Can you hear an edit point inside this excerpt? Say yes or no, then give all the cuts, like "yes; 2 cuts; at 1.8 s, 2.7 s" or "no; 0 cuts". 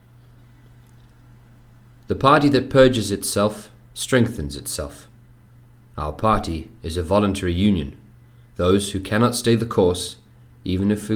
no; 0 cuts